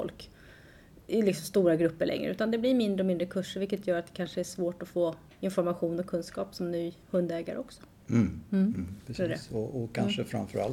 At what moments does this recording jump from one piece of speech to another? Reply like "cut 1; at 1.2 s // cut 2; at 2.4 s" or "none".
cut 1; at 1.0 s // cut 2; at 7.0 s